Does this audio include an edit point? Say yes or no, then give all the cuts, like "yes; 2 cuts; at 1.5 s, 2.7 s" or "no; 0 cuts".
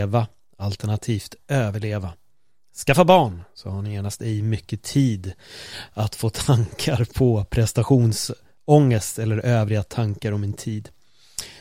no; 0 cuts